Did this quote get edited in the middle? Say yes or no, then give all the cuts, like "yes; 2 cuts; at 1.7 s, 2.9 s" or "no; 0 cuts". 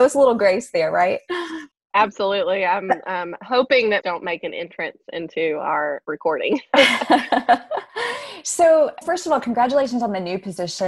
yes; 3 cuts; at 1.7 s, 4.0 s, 9.0 s